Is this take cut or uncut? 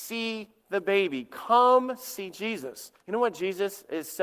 cut